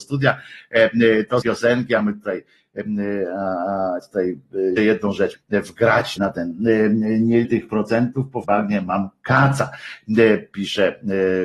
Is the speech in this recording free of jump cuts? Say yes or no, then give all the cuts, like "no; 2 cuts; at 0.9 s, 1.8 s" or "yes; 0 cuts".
no; 7 cuts; at 1.4 s, 4.0 s, 4.8 s, 5.3 s, 6.2 s, 7.4 s, 8.4 s